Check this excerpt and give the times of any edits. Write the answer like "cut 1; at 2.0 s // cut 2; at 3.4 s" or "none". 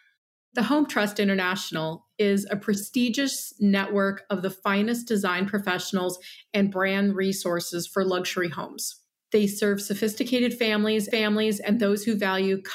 cut 1; at 11.1 s